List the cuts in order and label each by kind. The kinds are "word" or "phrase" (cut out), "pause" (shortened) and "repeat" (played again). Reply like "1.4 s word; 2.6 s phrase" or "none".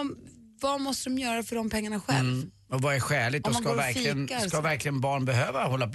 none